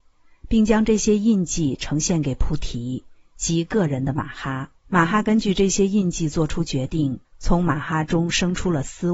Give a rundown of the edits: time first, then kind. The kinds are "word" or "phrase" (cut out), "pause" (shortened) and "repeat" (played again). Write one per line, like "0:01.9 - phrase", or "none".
0:04.8 - pause
0:07.2 - pause